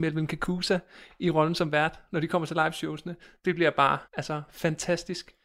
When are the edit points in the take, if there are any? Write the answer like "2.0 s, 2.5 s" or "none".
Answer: 4.0 s